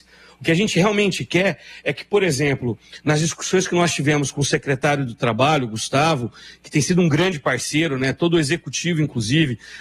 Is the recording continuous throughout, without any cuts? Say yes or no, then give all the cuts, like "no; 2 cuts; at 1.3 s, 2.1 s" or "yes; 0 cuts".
yes; 0 cuts